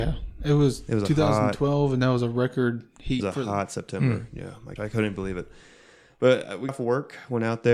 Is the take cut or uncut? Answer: cut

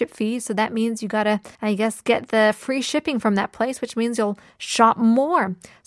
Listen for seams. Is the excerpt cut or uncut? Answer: cut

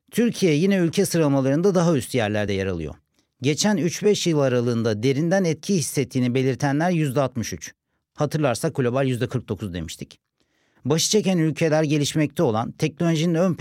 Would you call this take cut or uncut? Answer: uncut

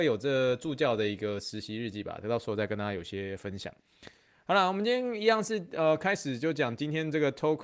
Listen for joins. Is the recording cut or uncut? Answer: uncut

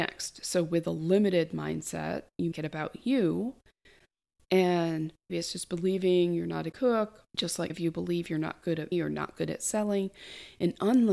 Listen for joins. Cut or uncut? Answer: cut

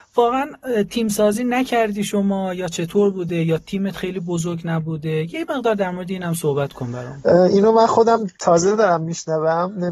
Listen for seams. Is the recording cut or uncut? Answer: uncut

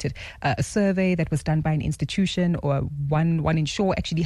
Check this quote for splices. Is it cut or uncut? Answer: uncut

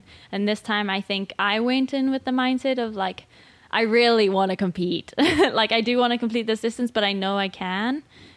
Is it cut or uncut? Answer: uncut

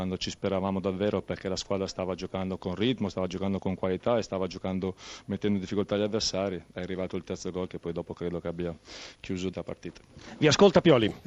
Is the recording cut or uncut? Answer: cut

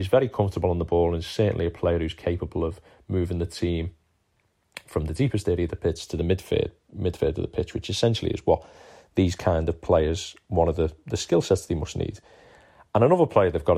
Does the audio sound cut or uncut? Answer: uncut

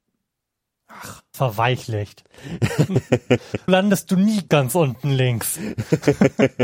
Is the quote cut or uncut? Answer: cut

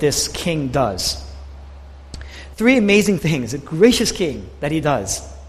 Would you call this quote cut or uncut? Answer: uncut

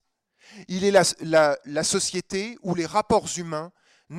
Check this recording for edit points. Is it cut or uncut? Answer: uncut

